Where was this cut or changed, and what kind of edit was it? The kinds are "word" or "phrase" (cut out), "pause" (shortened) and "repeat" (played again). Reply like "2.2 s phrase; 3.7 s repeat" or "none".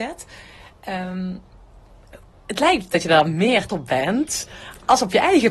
3.7 s word

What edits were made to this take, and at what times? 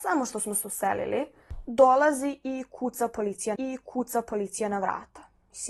3.5 s repeat

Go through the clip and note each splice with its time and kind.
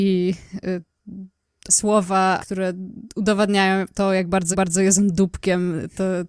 1.7 s word; 2.4 s word; 4.5 s repeat

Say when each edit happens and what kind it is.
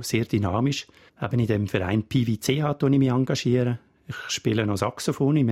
none

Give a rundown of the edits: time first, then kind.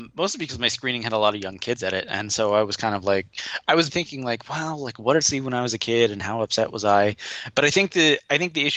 3.9 s word; 5.2 s word

